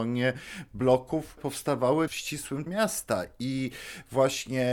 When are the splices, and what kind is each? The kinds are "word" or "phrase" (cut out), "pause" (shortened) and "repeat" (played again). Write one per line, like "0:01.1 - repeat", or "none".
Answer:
0:01.4 - word
0:02.1 - word
0:02.7 - word

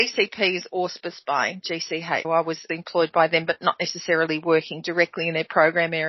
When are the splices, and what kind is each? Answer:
0:02.2 - word
0:02.7 - word

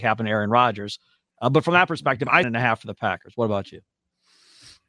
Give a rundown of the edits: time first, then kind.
0:02.4 - phrase

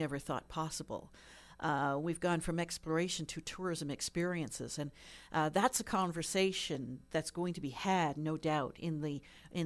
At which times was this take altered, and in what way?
none

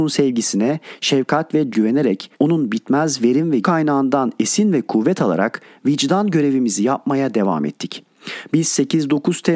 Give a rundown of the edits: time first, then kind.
0:01.7 - word
0:02.3 - pause
0:03.6 - word

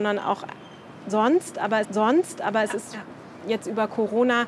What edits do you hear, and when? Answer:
0:01.8 - repeat

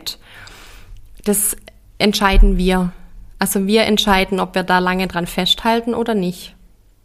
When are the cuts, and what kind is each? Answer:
none

